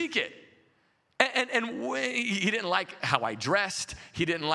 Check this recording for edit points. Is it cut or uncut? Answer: uncut